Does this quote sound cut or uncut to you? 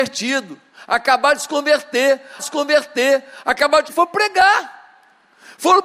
cut